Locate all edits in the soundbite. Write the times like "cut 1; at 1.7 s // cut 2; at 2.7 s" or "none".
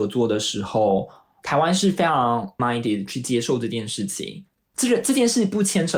cut 1; at 2.6 s

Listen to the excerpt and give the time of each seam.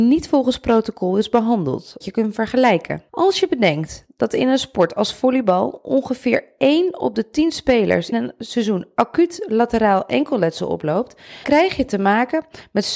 cut 1; at 2.0 s // cut 2; at 3.1 s // cut 3; at 8.1 s // cut 4; at 11.4 s

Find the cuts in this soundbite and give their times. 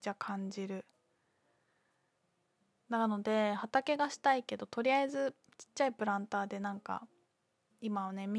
none

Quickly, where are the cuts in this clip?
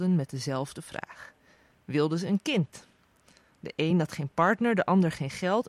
none

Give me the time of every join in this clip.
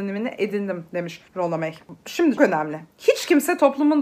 cut 1; at 1.3 s // cut 2; at 2.4 s

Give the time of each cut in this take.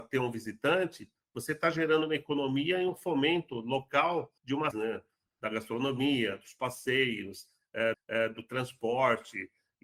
cut 1; at 4.4 s // cut 2; at 4.7 s // cut 3; at 7.9 s

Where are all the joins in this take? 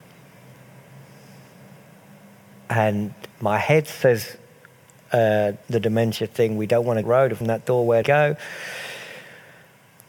cut 1; at 3.3 s // cut 2; at 5.6 s // cut 3; at 7.0 s // cut 4; at 7.4 s // cut 5; at 8.0 s

